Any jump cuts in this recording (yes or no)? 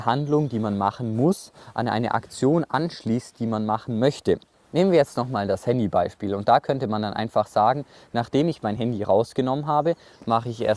no